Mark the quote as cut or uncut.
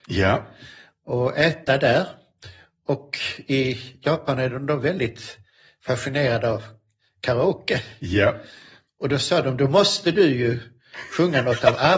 uncut